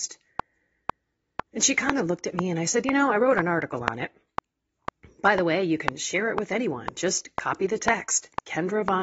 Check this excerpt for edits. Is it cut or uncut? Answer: uncut